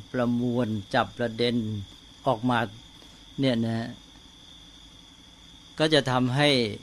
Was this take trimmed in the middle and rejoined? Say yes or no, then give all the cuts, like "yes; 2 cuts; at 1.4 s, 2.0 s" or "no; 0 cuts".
no; 0 cuts